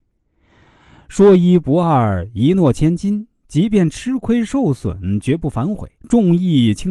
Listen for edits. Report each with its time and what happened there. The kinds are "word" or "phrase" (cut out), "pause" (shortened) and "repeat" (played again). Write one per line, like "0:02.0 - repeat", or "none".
0:06.0 - pause

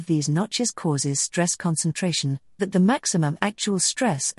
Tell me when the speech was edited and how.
0:02.6 - word

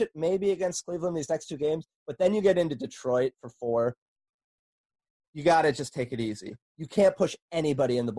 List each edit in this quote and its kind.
none

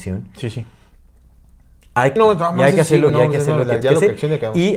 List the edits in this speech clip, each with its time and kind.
0:02.2 - phrase
0:03.1 - word
0:03.8 - word

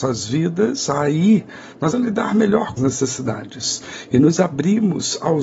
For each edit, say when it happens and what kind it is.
0:01.9 - word
0:02.8 - word

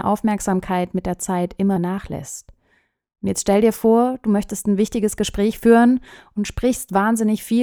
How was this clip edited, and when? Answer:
0:01.8 - word

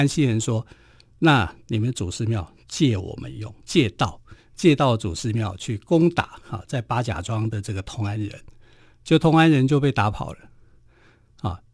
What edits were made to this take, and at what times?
0:03.6 - pause

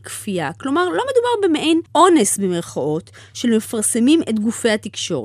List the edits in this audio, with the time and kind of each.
0:01.9 - pause

